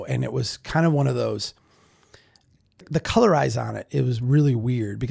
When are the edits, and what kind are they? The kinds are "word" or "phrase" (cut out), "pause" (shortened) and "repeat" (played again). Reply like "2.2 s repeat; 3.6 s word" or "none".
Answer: none

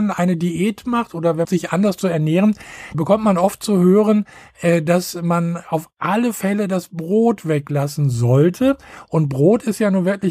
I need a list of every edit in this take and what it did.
1.4 s phrase; 2.9 s word

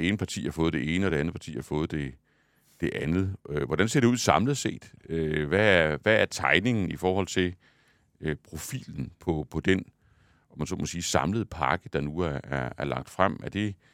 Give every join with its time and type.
none

